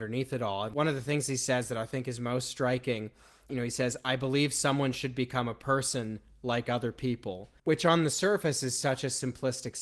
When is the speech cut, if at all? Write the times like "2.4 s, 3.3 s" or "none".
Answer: 7.6 s